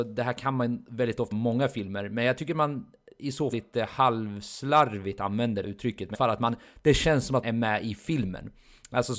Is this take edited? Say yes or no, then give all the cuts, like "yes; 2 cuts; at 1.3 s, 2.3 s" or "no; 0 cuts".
yes; 5 cuts; at 1.3 s, 3.5 s, 5.6 s, 6.1 s, 7.4 s